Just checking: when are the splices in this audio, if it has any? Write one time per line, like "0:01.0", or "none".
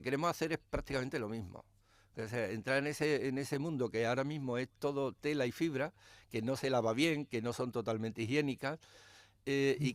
none